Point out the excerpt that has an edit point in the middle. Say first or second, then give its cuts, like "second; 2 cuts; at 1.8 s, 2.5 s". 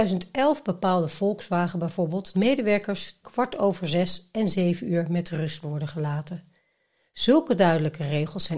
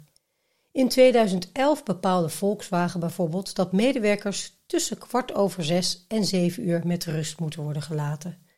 first; 3 cuts; at 2.3 s, 3.2 s, 5.6 s